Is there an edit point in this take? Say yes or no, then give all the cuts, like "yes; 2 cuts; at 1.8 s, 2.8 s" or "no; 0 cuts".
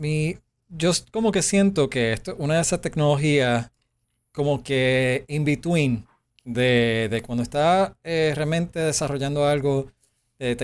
no; 0 cuts